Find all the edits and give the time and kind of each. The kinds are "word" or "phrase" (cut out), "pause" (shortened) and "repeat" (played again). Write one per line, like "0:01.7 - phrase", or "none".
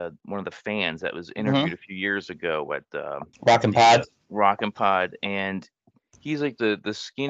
0:03.3 - pause